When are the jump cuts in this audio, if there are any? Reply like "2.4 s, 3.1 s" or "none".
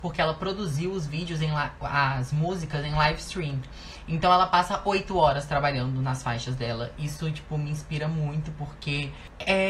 none